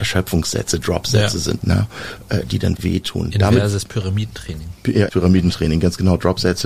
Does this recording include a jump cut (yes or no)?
yes